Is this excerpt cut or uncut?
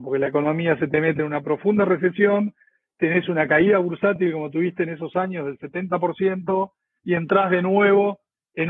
uncut